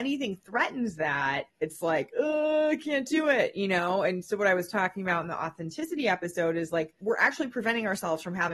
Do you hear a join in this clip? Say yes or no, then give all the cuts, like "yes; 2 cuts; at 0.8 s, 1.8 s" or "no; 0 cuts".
no; 0 cuts